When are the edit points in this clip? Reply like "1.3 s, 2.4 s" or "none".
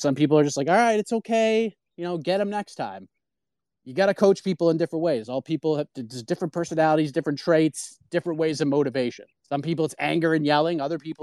9.4 s